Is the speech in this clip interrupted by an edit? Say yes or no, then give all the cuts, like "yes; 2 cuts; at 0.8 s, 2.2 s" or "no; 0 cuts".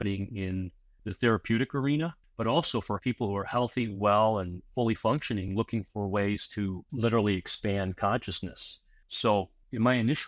no; 0 cuts